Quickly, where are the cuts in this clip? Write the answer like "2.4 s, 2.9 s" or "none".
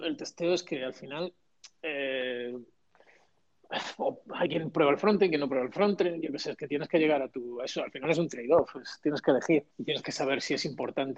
9.7 s